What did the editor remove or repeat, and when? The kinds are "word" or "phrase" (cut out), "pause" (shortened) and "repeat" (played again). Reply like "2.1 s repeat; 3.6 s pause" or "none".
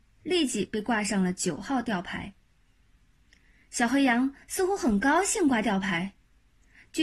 none